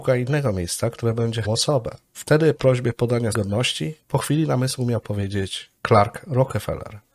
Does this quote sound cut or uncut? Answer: cut